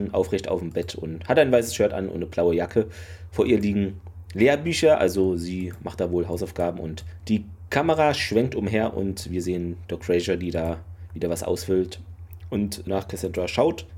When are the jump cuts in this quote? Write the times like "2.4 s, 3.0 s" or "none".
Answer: 12.9 s

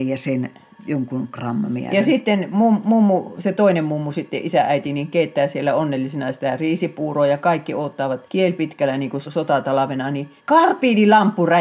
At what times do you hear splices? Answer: 8.3 s, 9.2 s, 10.4 s

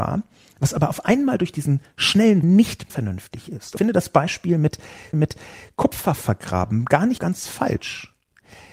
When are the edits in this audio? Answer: 2.4 s, 2.9 s, 3.8 s, 5.1 s, 7.2 s

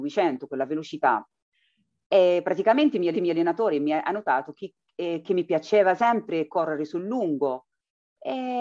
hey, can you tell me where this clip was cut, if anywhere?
3.1 s

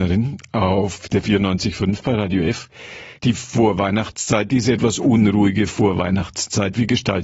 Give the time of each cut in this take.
3.2 s

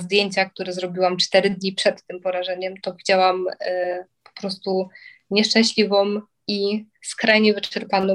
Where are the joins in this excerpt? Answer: none

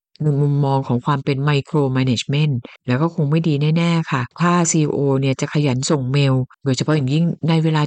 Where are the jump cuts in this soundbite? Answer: 2.8 s, 4.3 s, 6.5 s

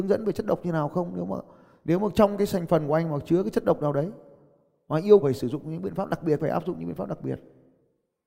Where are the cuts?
5.2 s, 6.4 s

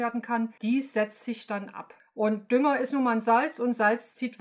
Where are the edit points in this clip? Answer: none

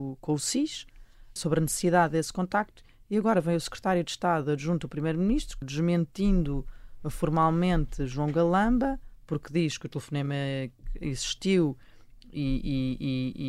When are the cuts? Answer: 1.4 s, 5.6 s

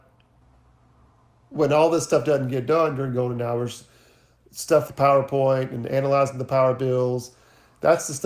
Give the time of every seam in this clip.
4.9 s

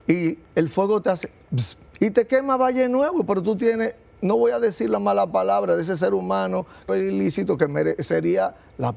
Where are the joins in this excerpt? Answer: 1.9 s, 6.9 s

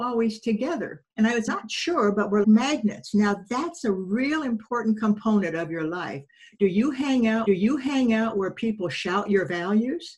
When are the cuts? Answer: 1.1 s, 1.5 s, 2.4 s, 7.5 s

